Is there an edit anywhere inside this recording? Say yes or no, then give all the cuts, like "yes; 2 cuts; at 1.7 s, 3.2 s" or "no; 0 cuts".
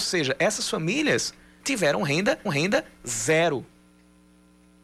yes; 2 cuts; at 1.6 s, 2.5 s